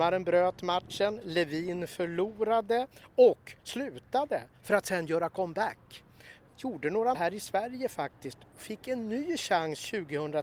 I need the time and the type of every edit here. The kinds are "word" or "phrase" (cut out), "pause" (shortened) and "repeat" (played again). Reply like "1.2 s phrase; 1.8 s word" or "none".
3.6 s pause; 6.5 s pause; 7.1 s word